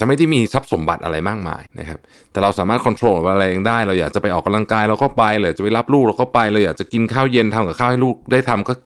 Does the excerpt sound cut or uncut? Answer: cut